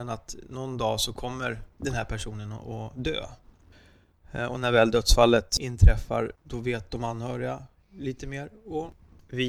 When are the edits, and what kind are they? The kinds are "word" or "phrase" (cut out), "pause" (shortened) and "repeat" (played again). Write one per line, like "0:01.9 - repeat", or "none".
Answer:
0:06.4 - pause